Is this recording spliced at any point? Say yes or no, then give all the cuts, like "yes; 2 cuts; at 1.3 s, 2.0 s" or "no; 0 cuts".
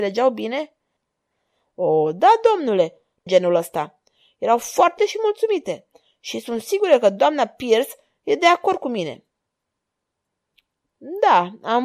yes; 2 cuts; at 3.3 s, 5.0 s